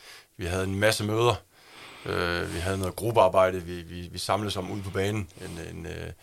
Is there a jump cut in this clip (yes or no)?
no